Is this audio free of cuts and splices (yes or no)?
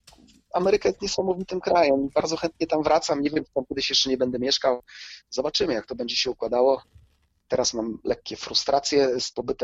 yes